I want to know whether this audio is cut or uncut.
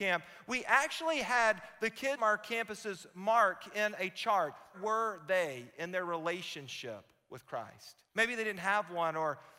cut